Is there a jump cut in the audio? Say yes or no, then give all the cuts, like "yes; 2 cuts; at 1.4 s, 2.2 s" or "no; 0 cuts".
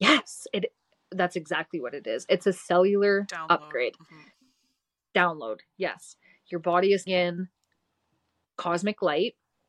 yes; 1 cut; at 7.1 s